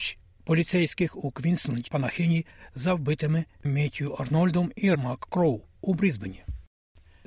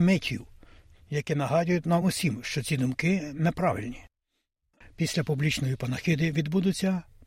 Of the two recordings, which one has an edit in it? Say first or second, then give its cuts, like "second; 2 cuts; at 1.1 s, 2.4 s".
first; 3 cuts; at 1.9 s, 3.6 s, 4.9 s